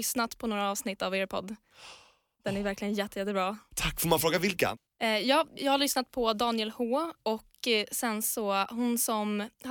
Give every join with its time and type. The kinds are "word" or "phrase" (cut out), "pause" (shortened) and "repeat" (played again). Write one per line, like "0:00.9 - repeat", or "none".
none